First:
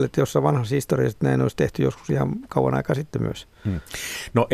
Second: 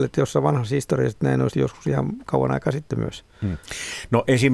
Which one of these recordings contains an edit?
second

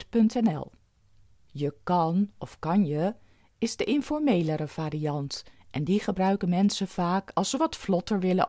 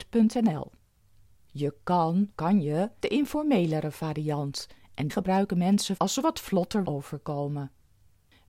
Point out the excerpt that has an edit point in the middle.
second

